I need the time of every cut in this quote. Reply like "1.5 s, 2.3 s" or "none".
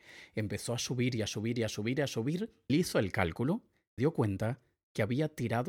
2.7 s, 4.0 s